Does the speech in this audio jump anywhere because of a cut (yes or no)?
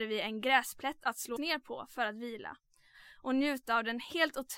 yes